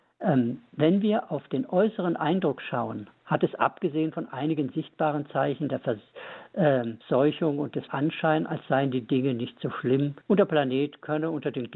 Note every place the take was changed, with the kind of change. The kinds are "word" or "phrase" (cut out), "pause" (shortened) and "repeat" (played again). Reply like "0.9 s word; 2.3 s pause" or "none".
7.0 s pause; 7.9 s phrase; 10.2 s pause